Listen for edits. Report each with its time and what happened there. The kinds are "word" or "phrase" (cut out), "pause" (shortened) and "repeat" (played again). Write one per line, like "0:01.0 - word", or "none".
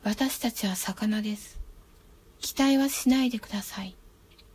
0:02.0 - pause